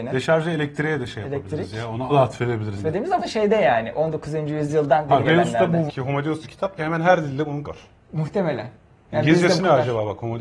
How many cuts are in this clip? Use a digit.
8